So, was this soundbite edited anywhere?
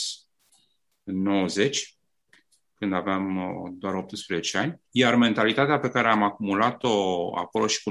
yes; 1 cut; at 4.9 s

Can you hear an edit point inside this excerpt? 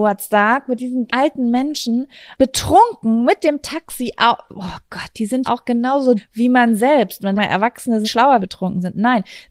yes; 7 cuts; at 1.1 s, 2.3 s, 5.4 s, 6.2 s, 7.4 s, 8.0 s, 8.4 s

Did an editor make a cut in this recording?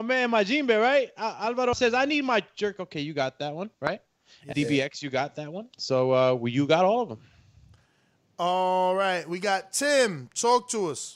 yes; 3 cuts; at 1.7 s, 3.7 s, 4.5 s

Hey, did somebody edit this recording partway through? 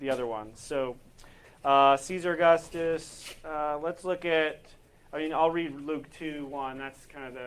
no; 0 cuts

